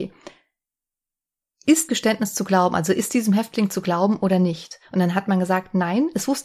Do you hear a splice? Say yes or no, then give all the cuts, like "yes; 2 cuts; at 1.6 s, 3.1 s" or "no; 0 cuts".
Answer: yes; 1 cut; at 1.9 s